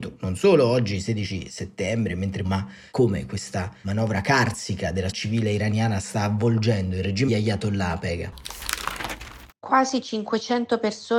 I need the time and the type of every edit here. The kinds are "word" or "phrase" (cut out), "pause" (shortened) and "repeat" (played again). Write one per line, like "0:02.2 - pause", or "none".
0:02.4 - word
0:05.1 - word
0:07.3 - word